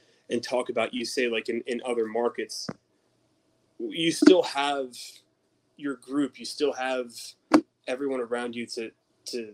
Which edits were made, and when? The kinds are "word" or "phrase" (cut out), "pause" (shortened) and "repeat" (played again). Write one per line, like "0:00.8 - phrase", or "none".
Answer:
none